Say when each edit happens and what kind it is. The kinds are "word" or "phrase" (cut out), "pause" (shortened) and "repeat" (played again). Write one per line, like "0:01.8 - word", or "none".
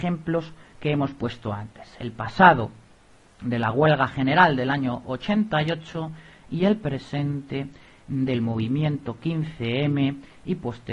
none